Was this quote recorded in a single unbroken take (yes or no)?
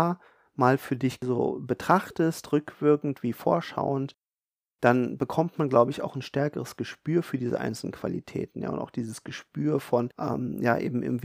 yes